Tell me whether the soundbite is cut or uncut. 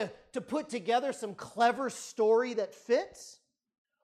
uncut